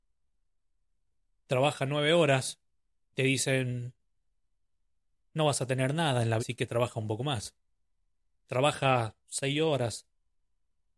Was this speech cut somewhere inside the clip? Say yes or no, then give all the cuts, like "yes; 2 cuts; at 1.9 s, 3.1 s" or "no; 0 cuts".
yes; 2 cuts; at 3.1 s, 6.4 s